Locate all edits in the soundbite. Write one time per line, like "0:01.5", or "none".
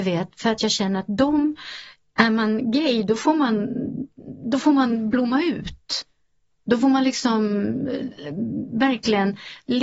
none